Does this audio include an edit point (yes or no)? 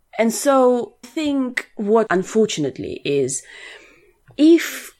yes